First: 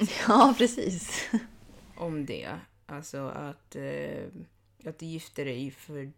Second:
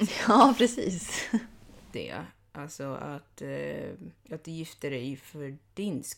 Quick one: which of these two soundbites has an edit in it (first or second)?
second